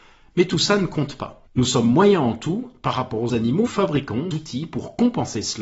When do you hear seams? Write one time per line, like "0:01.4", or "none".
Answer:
0:01.5
0:03.3
0:03.7
0:04.3